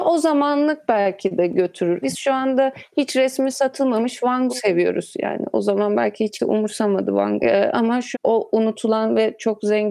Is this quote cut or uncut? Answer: cut